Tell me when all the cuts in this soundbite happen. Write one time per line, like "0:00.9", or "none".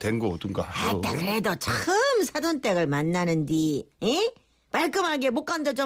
none